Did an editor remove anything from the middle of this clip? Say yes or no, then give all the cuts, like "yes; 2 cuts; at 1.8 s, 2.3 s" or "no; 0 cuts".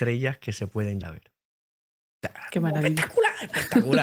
yes; 1 cut; at 1.0 s